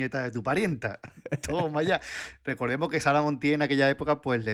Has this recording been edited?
no; 0 cuts

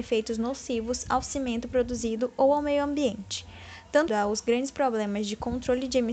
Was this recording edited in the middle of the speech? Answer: yes; 1 cut; at 4.1 s

